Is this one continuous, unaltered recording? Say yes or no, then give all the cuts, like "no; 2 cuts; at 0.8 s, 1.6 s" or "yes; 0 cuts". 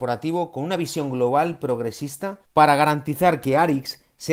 no; 1 cut; at 2.4 s